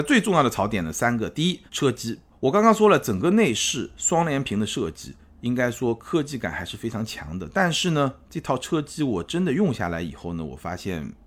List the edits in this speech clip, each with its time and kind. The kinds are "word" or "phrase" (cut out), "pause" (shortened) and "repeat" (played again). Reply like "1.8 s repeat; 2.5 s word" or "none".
1.7 s pause; 2.3 s pause